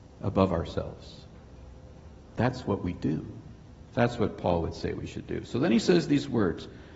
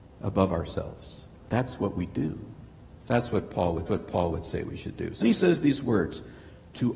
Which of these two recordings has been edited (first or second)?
second